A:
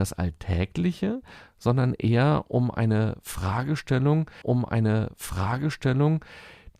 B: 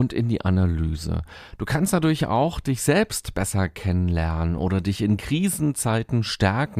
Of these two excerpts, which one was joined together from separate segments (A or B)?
A